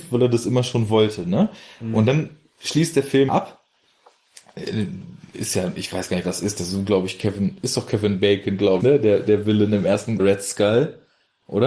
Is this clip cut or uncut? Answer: cut